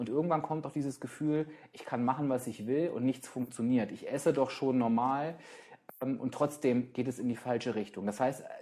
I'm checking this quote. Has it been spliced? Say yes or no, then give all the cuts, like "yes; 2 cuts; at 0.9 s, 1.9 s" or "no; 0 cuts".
no; 0 cuts